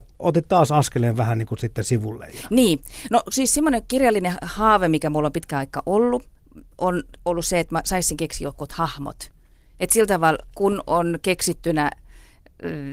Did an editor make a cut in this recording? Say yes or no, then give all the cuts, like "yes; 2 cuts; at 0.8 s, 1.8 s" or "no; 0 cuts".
no; 0 cuts